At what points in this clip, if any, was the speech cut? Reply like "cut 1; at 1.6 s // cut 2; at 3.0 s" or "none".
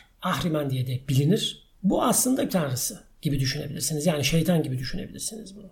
cut 1; at 1.7 s // cut 2; at 2.5 s